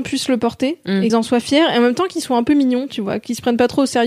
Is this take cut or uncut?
cut